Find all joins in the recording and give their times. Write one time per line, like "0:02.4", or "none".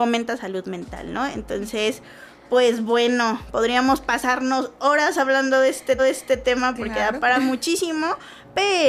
0:06.0